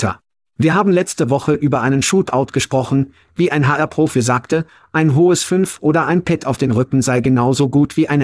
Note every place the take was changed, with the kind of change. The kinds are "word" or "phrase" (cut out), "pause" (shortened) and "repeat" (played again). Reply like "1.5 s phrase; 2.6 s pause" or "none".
none

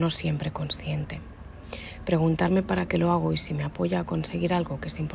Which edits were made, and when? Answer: none

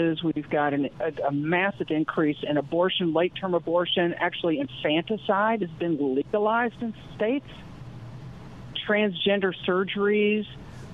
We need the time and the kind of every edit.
none

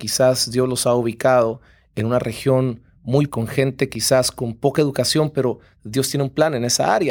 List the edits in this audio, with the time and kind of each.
3.3 s phrase

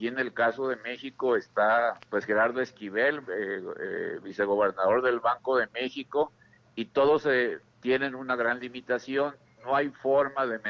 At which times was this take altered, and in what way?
2.0 s pause

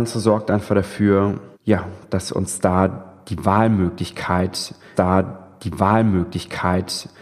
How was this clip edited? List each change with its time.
1.5 s pause; 4.9 s repeat

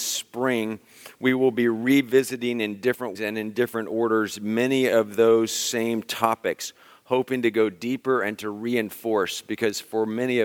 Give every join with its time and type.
3.2 s word

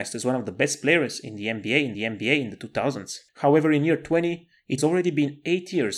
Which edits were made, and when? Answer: 1.9 s repeat; 3.3 s pause; 4.8 s word

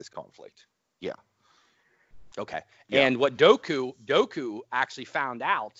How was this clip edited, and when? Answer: none

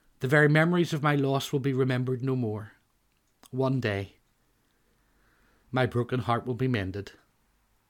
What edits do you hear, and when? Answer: none

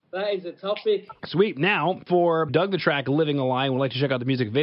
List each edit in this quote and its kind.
2.5 s phrase

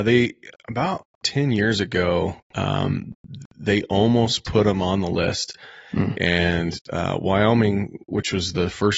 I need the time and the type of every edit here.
1.1 s pause; 2.4 s pause

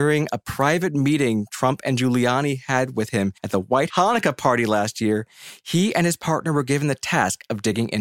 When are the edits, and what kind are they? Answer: 3.4 s pause; 3.9 s word

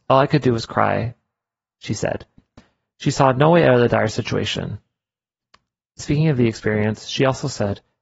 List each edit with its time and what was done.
none

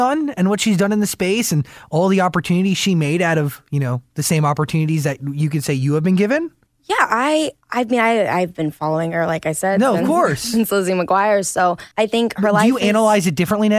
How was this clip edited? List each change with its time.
6.7 s pause; 7.6 s pause; 11.9 s pause

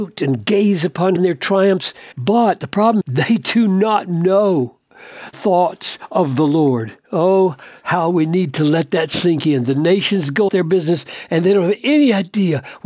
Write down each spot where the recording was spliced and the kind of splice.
1.2 s word; 2.1 s pause; 3.0 s word; 5.3 s word; 10.5 s word

